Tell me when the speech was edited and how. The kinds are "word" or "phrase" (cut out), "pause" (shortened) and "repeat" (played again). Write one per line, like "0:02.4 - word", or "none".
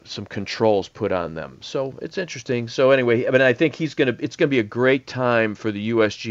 none